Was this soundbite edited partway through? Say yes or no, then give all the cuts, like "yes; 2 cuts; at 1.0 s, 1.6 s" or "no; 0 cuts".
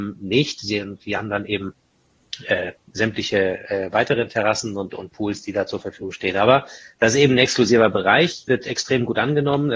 no; 0 cuts